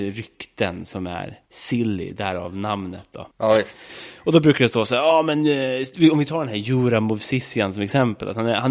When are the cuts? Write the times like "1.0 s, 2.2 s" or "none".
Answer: 1.4 s, 3.3 s